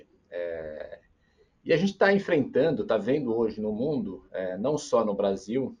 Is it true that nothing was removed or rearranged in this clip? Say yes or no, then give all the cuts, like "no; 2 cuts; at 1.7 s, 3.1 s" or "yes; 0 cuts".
yes; 0 cuts